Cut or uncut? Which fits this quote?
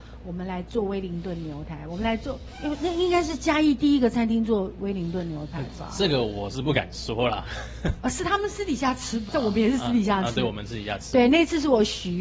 cut